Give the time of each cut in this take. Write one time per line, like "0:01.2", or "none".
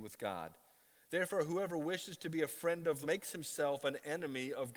0:03.0